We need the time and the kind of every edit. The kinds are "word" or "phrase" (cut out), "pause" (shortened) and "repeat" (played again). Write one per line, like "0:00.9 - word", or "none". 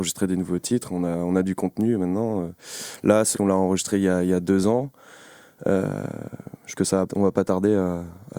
0:03.3 - word
0:06.7 - word
0:07.1 - word